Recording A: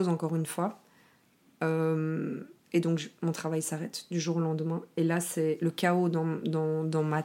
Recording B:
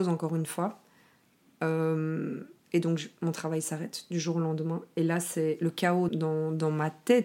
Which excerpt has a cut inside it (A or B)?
B